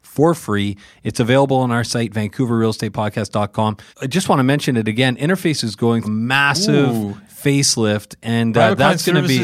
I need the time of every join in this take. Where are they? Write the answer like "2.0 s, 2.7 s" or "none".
3.9 s, 5.6 s, 6.0 s